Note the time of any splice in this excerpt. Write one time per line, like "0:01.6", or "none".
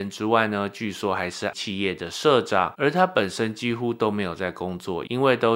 0:01.5